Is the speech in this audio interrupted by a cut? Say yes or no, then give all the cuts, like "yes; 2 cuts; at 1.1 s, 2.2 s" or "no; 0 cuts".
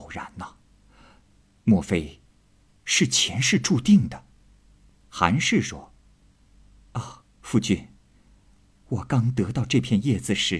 no; 0 cuts